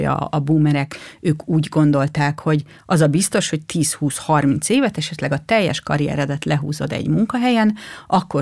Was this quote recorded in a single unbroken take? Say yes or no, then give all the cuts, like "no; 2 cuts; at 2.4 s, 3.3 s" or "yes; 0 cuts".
yes; 0 cuts